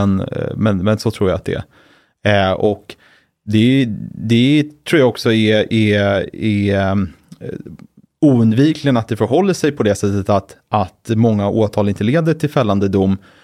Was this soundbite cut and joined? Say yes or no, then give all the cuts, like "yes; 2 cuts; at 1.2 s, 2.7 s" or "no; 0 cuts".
no; 0 cuts